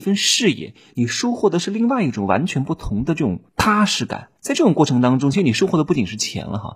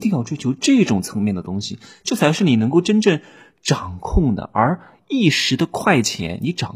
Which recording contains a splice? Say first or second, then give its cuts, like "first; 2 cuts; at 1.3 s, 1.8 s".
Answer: first; 2 cuts; at 3.5 s, 4.4 s